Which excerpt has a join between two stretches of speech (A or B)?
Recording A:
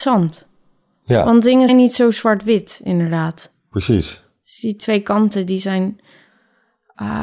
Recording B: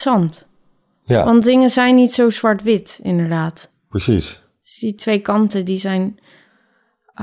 A